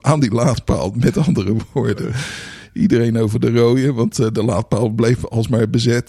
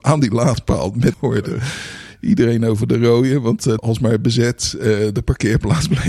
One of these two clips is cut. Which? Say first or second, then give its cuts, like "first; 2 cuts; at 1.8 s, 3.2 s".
second; 2 cuts; at 1.1 s, 3.8 s